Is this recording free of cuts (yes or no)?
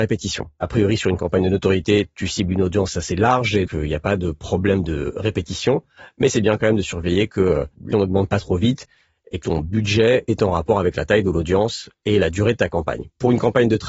no